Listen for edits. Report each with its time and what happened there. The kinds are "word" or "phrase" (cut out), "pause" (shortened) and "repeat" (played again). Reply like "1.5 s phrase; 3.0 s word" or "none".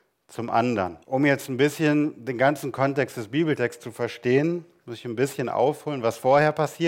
1.0 s pause